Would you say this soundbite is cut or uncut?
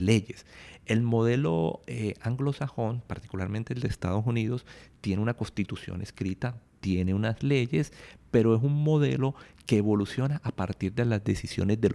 uncut